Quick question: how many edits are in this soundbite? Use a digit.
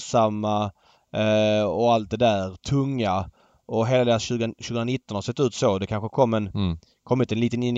0